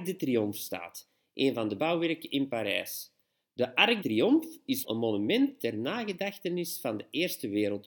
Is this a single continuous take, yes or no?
no